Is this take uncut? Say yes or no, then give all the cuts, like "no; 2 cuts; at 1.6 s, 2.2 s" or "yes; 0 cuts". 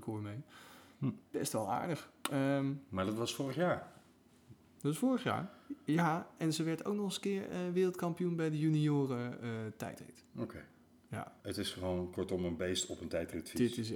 no; 2 cuts; at 1.3 s, 11.4 s